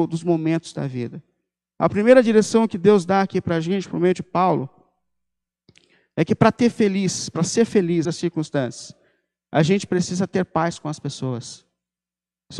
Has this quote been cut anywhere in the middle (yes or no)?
yes